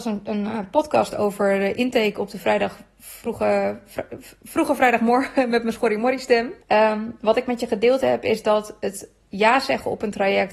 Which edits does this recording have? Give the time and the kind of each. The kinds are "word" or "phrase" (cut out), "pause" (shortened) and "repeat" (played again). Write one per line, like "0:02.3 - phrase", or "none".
0:06.6 - pause